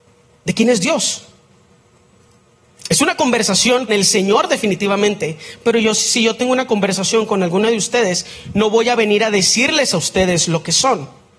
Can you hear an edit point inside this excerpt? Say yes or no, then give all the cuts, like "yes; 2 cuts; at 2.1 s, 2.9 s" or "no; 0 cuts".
yes; 1 cut; at 3.9 s